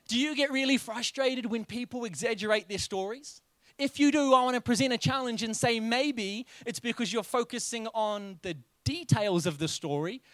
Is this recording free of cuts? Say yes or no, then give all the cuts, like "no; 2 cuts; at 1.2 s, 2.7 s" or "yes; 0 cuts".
yes; 0 cuts